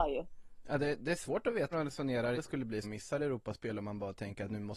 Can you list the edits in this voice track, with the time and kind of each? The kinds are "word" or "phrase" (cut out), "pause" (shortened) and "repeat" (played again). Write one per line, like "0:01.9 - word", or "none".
0:01.7 - word
0:02.3 - word
0:02.8 - word